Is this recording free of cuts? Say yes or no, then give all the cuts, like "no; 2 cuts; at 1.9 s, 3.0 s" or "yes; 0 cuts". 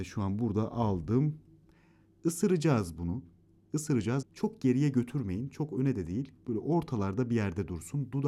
no; 1 cut; at 4.2 s